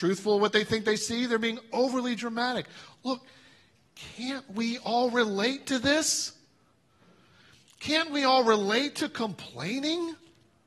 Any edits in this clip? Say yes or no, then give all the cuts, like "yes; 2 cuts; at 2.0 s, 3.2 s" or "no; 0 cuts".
no; 0 cuts